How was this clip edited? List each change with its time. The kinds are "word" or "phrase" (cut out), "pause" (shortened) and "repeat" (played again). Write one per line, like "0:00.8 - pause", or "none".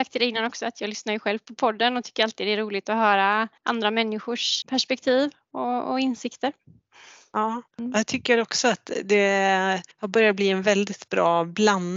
0:03.6 - pause
0:04.6 - word
0:07.7 - pause
0:09.9 - pause